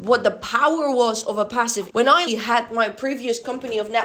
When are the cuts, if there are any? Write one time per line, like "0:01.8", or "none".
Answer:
0:01.9
0:02.3